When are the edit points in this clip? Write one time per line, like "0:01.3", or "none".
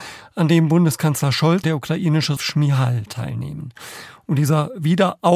0:01.6
0:02.4